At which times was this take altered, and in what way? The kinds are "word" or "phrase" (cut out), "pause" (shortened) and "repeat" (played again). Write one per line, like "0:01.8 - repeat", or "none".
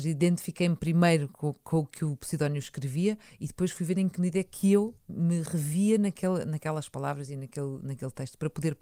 0:05.0 - pause